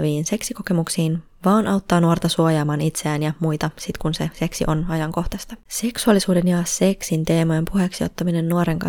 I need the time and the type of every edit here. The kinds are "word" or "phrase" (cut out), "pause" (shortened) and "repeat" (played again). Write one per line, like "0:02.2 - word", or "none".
0:05.6 - pause

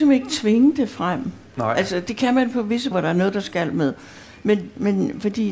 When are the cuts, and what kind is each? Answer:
0:02.9 - word

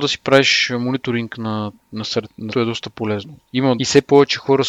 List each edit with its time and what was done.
0:01.8 - pause
0:02.5 - word
0:03.8 - phrase

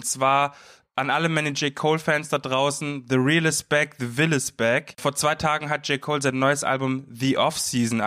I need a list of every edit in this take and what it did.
none

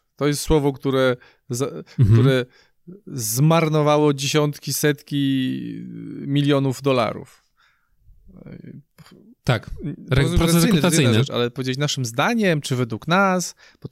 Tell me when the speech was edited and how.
none

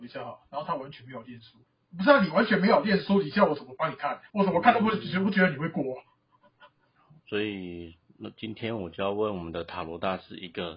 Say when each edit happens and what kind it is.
0:01.7 - pause
0:04.3 - pause
0:07.2 - pause

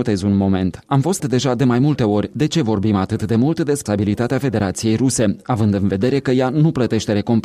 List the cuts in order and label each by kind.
0:01.2 - word
0:03.9 - word

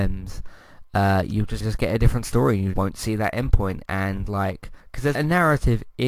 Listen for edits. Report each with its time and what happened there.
0:01.6 - word
0:02.7 - word
0:04.8 - pause
0:05.1 - phrase

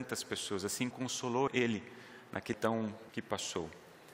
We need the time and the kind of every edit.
0:00.9 - word
0:01.5 - word
0:02.5 - word
0:03.1 - word

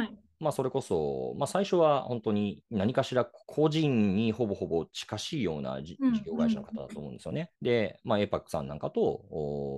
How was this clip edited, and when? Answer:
0:03.4 - pause
0:07.5 - pause

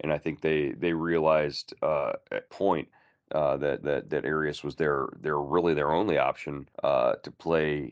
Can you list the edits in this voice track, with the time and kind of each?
0:02.5 - phrase
0:03.8 - repeat
0:06.7 - pause

